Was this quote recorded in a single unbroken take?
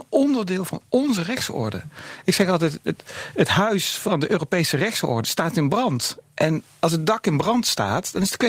yes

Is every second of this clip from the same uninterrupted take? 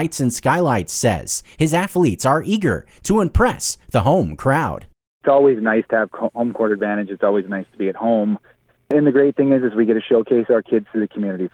yes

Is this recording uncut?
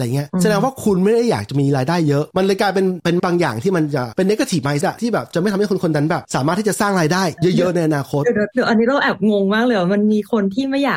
no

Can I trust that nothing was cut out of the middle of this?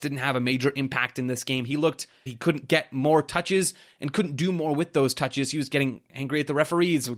no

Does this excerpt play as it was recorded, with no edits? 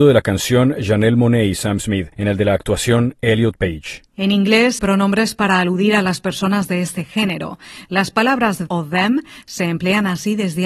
no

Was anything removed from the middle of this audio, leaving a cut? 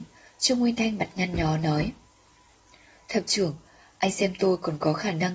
no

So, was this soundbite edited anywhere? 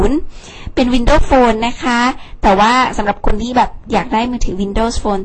no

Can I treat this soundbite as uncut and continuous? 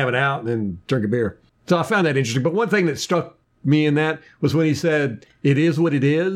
yes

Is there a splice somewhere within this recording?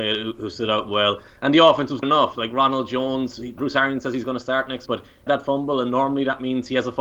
yes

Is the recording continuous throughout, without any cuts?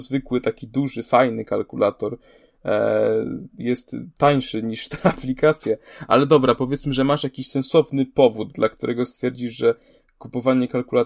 yes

